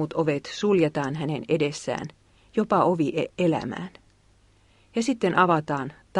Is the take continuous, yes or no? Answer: yes